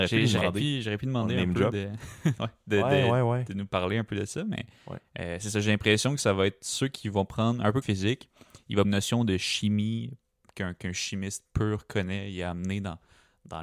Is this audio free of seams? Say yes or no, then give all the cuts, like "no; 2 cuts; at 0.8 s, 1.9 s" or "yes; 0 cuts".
no; 2 cuts; at 7.8 s, 8.8 s